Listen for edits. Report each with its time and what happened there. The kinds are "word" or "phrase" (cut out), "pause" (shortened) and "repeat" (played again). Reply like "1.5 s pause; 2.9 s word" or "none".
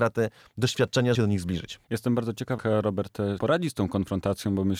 1.1 s word; 1.8 s pause; 2.6 s word; 3.4 s word